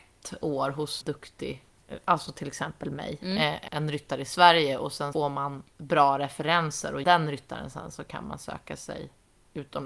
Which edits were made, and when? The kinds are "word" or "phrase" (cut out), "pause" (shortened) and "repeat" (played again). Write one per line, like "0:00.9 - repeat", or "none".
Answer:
0:01.0 - word
0:03.7 - word
0:05.1 - word
0:07.0 - word